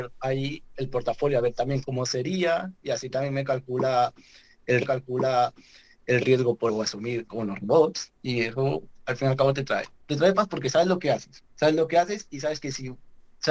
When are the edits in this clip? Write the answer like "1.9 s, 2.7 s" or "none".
1.8 s, 2.8 s, 4.8 s, 6.7 s, 7.2 s, 8.1 s, 10.0 s, 11.5 s